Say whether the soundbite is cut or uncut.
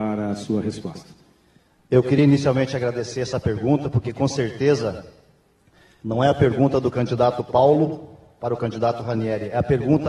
uncut